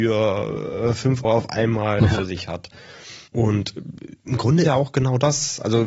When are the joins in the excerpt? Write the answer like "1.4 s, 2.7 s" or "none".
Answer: 1.2 s, 2.0 s, 3.3 s, 4.6 s